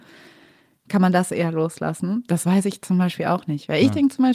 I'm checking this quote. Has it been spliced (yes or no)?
no